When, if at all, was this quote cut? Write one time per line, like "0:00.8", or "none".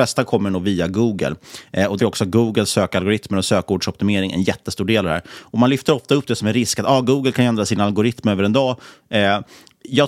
0:02.0